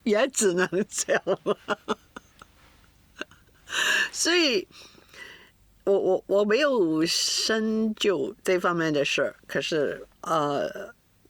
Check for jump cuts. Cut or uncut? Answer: cut